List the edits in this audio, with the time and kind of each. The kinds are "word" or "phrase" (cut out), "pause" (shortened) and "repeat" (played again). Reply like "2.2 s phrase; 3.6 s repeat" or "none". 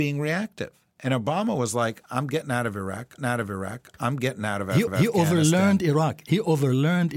3.2 s repeat; 4.9 s repeat

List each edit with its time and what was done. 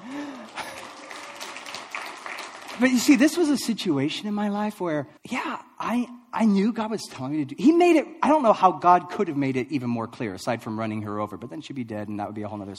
5.2 s pause

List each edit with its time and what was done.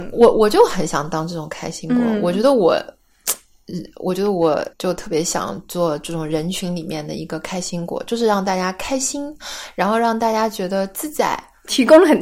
4.7 s pause

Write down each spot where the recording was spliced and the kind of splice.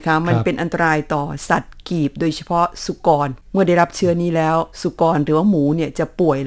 4.7 s pause

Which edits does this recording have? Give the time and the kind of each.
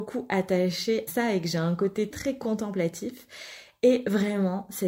1.1 s word; 2.1 s word

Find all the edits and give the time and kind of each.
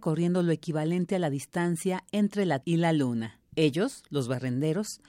2.6 s word

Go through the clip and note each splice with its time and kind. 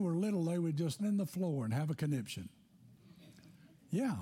1.0 s phrase

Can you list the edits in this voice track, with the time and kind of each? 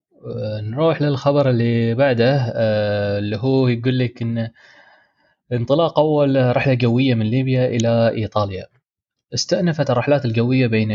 none

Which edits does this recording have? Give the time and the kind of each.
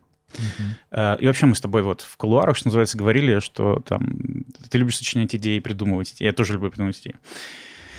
none

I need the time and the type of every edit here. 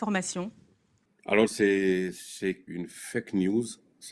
2.7 s phrase

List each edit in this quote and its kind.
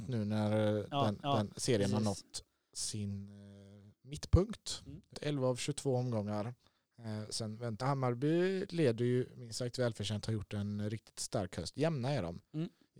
1.2 s repeat; 5.1 s word; 7.8 s phrase

